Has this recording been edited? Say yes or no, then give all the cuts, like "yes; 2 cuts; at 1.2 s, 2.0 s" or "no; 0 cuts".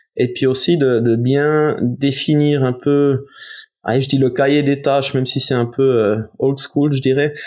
no; 0 cuts